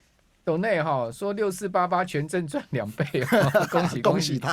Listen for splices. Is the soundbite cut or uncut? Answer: uncut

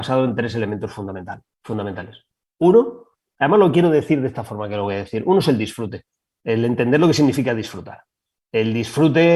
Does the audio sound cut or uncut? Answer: uncut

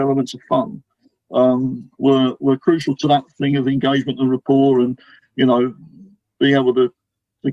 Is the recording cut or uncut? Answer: uncut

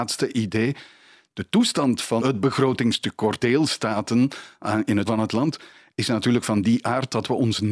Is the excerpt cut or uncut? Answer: cut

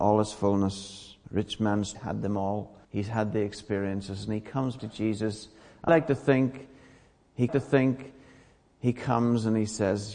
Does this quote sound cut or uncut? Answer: cut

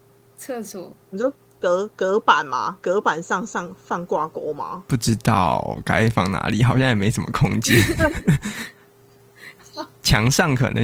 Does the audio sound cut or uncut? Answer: cut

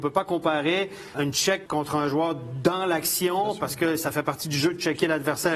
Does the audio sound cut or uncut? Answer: cut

